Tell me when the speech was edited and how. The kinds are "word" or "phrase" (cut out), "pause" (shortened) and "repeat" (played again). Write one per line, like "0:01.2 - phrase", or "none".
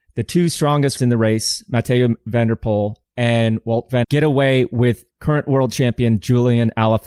0:01.0 - word
0:04.0 - word
0:05.1 - pause